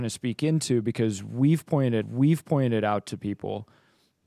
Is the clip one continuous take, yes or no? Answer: no